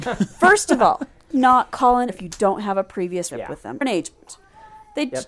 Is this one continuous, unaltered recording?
no; 4 cuts; at 1.3 s, 2.1 s, 3.3 s, 3.8 s

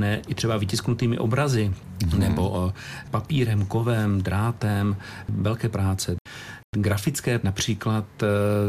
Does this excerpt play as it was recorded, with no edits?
no; 2 cuts; at 5.7 s, 7.4 s

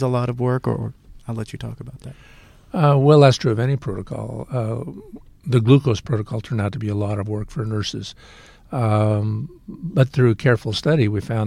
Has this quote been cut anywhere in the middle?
no; 0 cuts

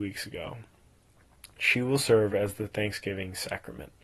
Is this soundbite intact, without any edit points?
yes; 0 cuts

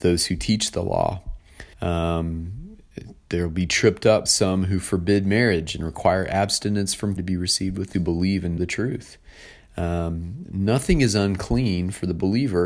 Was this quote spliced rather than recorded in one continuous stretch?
yes; 5 cuts; at 1.7 s, 4.3 s, 7.2 s, 7.9 s, 8.6 s

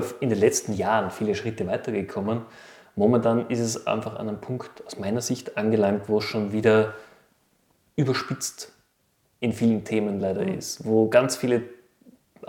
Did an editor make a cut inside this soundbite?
no; 0 cuts

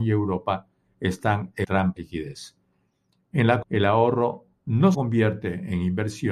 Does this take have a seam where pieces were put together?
yes; 4 cuts; at 1.6 s, 2.0 s, 3.6 s, 4.9 s

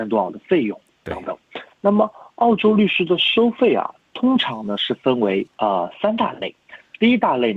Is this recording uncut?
no; 2 cuts; at 1.7 s, 5.5 s

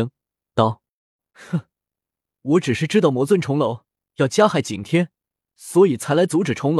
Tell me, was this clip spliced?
no; 0 cuts

